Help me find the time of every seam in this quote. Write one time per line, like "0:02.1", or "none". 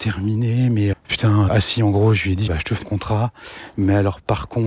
0:00.9
0:01.5
0:02.5
0:02.8